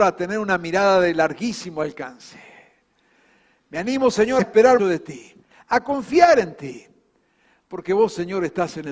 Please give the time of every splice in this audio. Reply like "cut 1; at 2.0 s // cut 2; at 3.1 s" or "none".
cut 1; at 4.4 s // cut 2; at 4.8 s // cut 3; at 5.4 s